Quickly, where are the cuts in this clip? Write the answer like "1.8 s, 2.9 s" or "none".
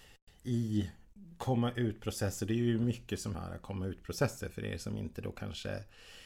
3.3 s